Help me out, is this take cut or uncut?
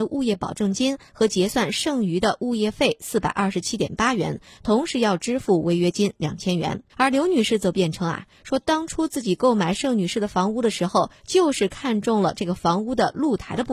cut